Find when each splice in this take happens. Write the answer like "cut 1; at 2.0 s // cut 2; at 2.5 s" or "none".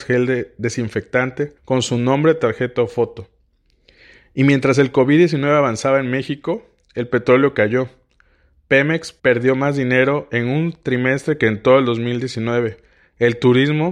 cut 1; at 1.6 s // cut 2; at 9.2 s